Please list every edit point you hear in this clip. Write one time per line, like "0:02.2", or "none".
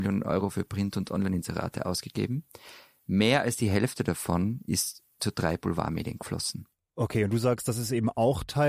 none